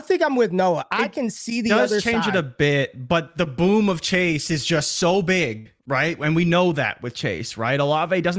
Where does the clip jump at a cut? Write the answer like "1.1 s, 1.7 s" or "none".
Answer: 5.8 s